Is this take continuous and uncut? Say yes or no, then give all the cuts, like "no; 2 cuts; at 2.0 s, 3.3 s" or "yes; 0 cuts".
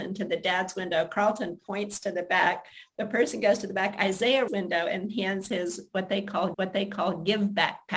no; 2 cuts; at 4.5 s, 6.5 s